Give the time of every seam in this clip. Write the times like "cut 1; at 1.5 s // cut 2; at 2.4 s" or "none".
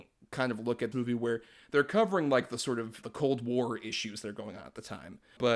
cut 1; at 0.9 s // cut 2; at 3.0 s